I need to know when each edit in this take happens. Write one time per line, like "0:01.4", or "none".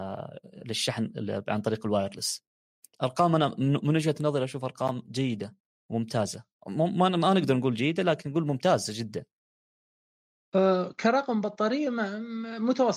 none